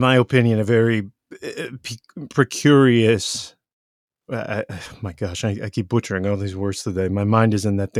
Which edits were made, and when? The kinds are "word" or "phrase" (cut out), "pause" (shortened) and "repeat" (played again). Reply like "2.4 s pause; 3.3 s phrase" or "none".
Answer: none